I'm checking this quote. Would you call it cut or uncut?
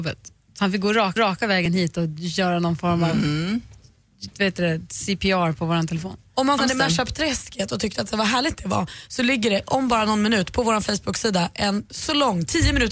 cut